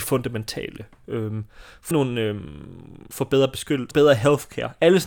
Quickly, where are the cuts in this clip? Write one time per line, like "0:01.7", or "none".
0:01.9
0:03.1
0:03.9

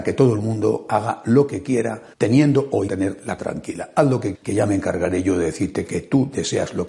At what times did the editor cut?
0:02.1
0:02.9
0:03.4
0:04.3
0:05.9

